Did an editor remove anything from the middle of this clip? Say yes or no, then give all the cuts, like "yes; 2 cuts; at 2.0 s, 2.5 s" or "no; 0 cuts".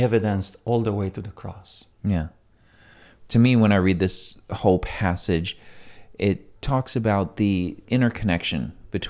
yes; 1 cut; at 1.9 s